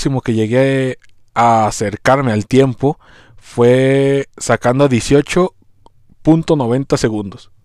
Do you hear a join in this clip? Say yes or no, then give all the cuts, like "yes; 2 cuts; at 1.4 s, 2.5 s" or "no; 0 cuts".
no; 0 cuts